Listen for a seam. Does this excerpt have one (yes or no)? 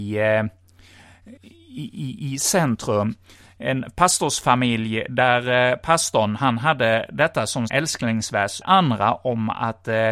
yes